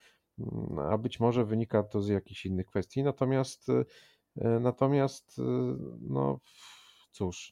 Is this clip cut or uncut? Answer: uncut